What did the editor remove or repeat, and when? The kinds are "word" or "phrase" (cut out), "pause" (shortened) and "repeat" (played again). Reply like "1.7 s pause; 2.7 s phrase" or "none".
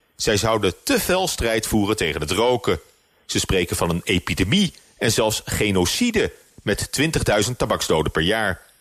none